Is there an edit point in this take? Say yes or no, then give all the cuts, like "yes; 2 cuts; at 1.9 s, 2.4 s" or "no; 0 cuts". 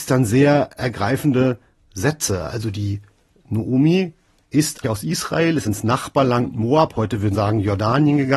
yes; 2 cuts; at 4.8 s, 7.3 s